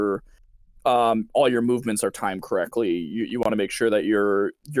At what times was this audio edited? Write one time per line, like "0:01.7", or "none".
none